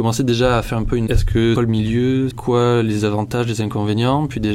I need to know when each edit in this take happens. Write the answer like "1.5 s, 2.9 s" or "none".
1.1 s, 1.6 s, 2.3 s

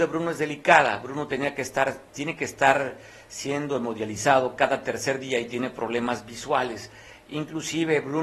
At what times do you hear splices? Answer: none

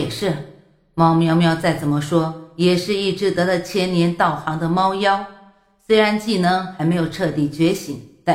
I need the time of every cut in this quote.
none

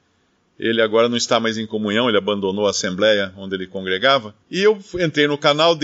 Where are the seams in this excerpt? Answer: 4.4 s

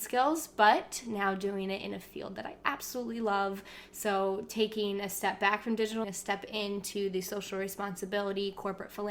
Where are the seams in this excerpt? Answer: 6.0 s

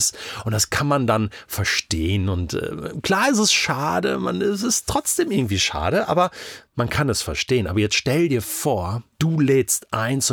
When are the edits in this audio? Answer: 9.1 s

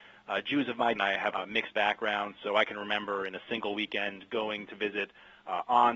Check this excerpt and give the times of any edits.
1.0 s, 1.3 s, 1.7 s

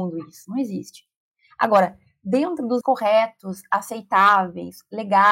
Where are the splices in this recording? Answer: 2.8 s

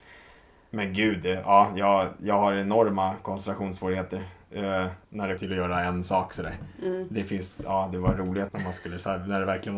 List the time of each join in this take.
5.0 s, 5.4 s, 8.5 s

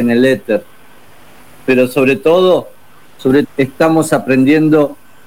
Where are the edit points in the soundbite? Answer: 3.4 s

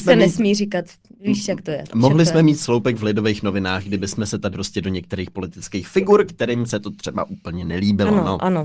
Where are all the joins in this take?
4.5 s

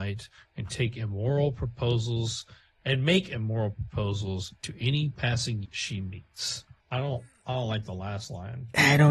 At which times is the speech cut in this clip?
5.6 s, 6.8 s

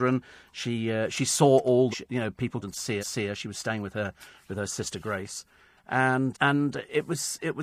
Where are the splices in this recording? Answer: 1.9 s, 2.6 s, 3.0 s, 6.3 s

